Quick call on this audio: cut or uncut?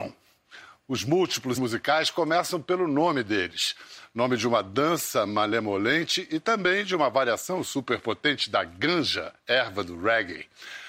cut